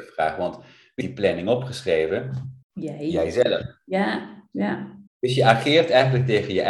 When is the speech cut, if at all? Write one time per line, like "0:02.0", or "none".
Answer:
0:01.0
0:02.6
0:05.1

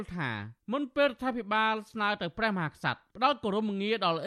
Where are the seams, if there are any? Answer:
0:03.1

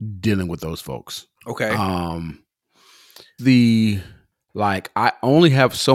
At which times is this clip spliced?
0:01.3
0:03.4

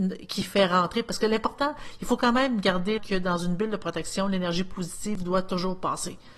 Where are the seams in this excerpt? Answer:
0:03.0

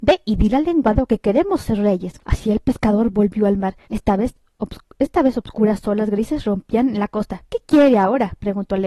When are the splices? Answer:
0:02.2
0:03.8
0:04.5

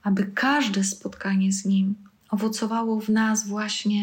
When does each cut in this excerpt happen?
none

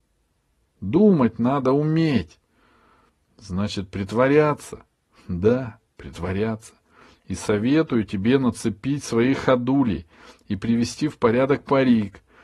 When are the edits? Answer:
none

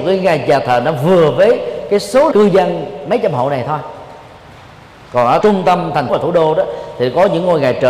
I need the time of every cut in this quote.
0:02.3
0:05.4
0:06.1

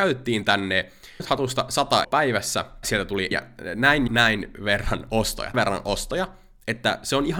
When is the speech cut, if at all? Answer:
0:01.2
0:02.0
0:02.8
0:03.3
0:04.1
0:05.5

